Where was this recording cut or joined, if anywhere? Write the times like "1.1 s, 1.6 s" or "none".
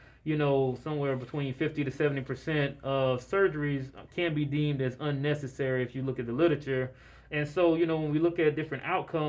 none

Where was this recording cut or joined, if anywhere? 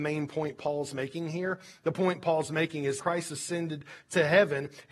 3.0 s

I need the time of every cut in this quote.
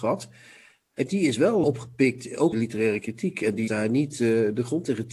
1.6 s, 2.5 s, 3.7 s

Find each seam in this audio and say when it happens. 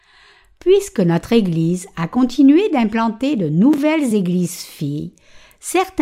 none

